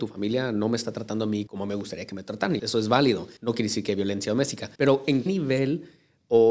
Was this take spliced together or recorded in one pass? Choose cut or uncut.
cut